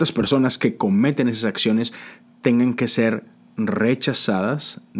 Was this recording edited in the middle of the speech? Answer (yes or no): no